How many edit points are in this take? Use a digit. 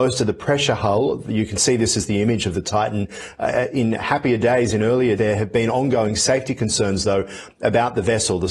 1